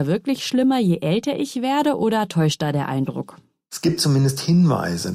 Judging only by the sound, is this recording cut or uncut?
uncut